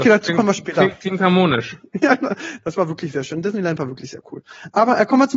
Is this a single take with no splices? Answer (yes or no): yes